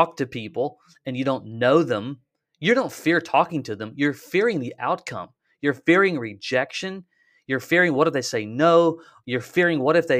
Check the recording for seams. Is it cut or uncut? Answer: uncut